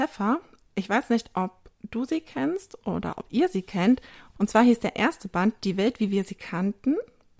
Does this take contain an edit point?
no; 0 cuts

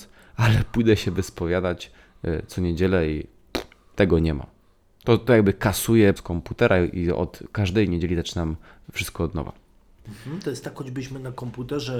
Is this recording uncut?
no; 1 cut; at 6.2 s

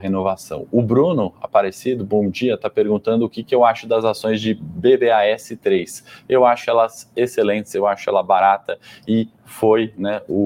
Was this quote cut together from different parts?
no; 0 cuts

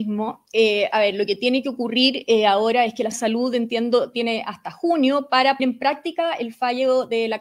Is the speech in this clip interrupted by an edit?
yes; 2 cuts; at 3.1 s, 5.6 s

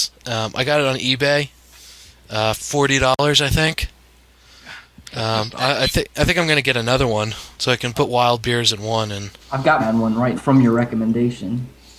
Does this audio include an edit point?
yes; 5 cuts; at 2.5 s, 7.5 s, 9.4 s, 9.8 s, 10.4 s

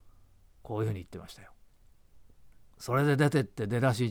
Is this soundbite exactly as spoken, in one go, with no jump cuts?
yes; 0 cuts

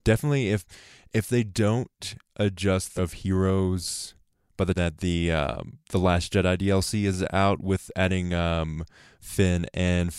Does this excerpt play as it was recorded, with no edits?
no; 3 cuts; at 3.0 s, 4.7 s, 5.8 s

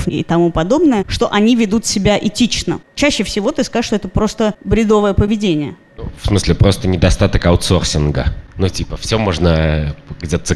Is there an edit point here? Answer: no; 0 cuts

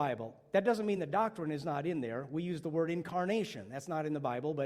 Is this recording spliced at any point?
no; 0 cuts

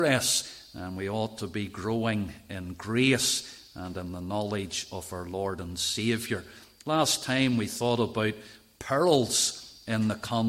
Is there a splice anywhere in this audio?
no; 0 cuts

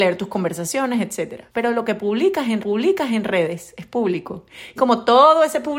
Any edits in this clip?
yes; 3 cuts; at 1.5 s, 2.6 s, 4.8 s

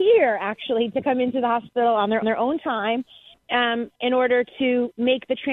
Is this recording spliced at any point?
yes; 2 cuts; at 2.2 s, 3.9 s

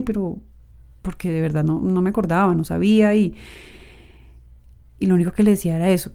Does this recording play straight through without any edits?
yes; 0 cuts

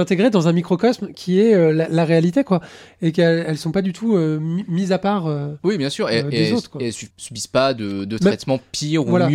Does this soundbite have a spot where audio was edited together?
yes; 1 cut; at 7.1 s

